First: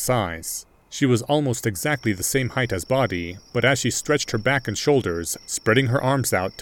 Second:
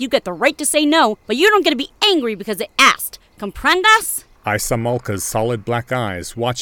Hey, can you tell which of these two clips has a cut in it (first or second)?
second